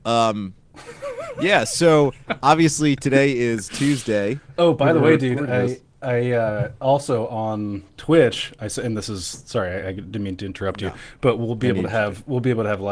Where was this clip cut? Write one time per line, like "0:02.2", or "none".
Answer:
0:09.8